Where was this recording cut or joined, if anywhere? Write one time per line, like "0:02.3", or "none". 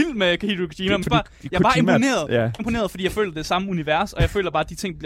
0:01.0
0:02.6

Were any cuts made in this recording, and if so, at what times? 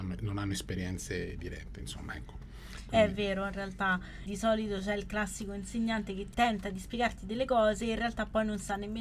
0:04.3
0:06.3

